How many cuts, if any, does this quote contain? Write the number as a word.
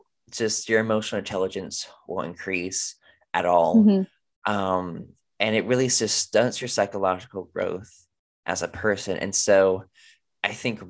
zero